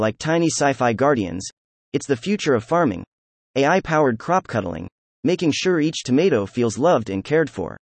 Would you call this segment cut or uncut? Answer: uncut